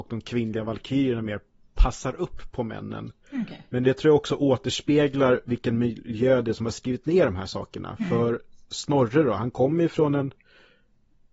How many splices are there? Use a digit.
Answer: 0